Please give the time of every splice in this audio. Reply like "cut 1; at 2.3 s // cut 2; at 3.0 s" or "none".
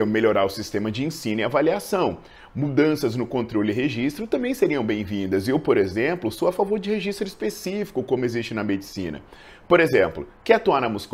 none